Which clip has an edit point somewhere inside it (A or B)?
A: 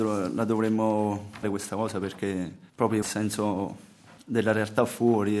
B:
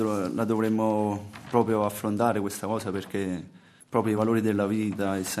A